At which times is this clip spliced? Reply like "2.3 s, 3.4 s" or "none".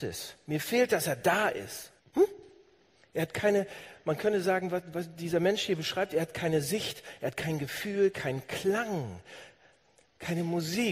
2.0 s

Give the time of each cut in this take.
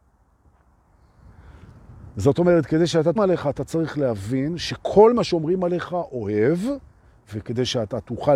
3.2 s

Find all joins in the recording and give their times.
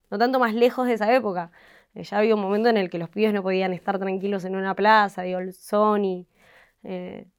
none

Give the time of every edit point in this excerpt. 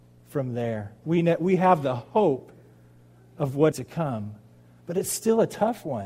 3.7 s

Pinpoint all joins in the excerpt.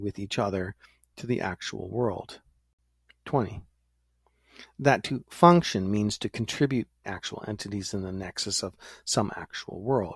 7.0 s

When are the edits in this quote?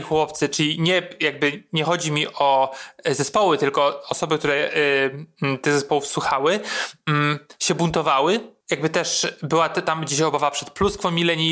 none

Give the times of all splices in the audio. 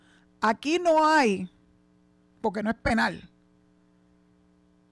none

